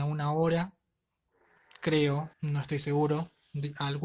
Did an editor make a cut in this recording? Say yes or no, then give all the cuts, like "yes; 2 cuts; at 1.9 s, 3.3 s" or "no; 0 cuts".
yes; 1 cut; at 2.3 s